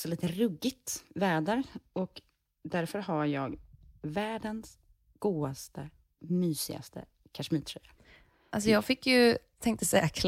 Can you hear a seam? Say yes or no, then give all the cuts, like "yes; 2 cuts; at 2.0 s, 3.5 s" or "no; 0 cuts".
no; 0 cuts